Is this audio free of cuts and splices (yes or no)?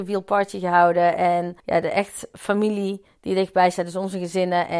no